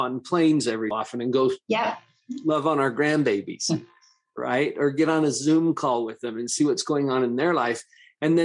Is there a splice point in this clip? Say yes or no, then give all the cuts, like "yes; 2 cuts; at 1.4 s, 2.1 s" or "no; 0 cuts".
yes; 1 cut; at 0.9 s